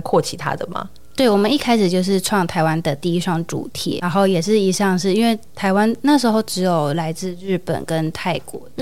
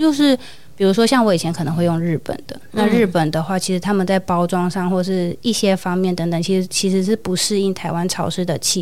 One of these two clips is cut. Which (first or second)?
first